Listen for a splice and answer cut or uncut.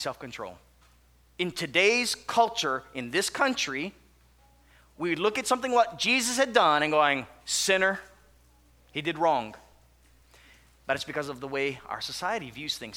uncut